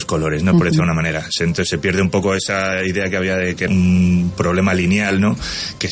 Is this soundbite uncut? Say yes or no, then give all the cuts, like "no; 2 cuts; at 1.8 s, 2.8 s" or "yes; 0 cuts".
no; 1 cut; at 3.7 s